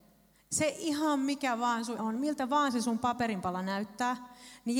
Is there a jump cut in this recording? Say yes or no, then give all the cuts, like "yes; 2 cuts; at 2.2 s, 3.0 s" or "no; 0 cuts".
yes; 1 cut; at 2.0 s